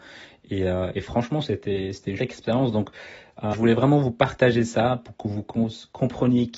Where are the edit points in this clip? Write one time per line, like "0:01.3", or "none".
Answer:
0:02.2
0:03.5